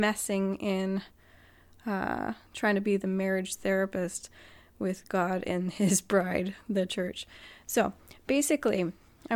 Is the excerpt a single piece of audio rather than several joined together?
no; 1 cut; at 2.5 s

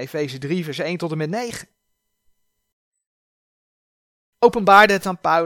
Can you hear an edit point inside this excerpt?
yes; 1 cut; at 4.4 s

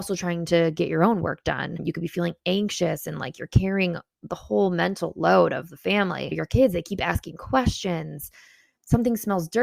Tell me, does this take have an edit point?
no; 0 cuts

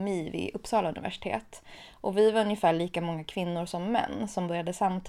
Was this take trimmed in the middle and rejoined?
no; 0 cuts

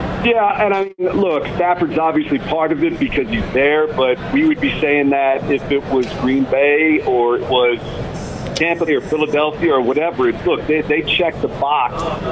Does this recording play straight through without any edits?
no; 3 cuts; at 7.4 s, 8.9 s, 10.4 s

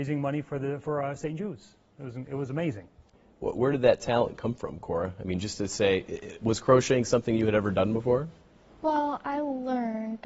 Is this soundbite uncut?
yes; 0 cuts

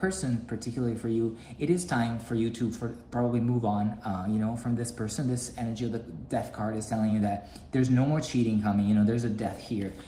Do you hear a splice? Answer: no; 0 cuts

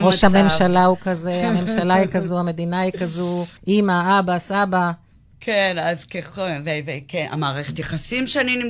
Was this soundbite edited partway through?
yes; 2 cuts; at 3.6 s, 5.1 s

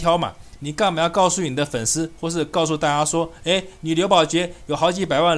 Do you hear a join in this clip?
no; 0 cuts

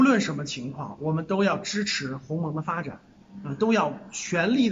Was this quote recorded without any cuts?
yes; 0 cuts

